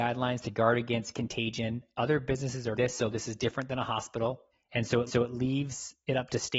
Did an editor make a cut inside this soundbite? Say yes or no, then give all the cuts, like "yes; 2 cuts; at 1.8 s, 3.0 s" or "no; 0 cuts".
yes; 3 cuts; at 2.8 s, 4.5 s, 5.1 s